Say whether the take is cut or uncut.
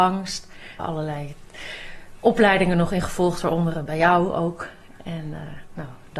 uncut